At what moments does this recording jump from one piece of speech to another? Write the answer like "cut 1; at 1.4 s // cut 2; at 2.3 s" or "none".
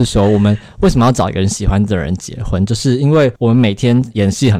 cut 1; at 3.4 s